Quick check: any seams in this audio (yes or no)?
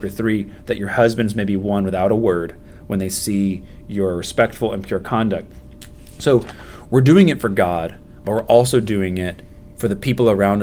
no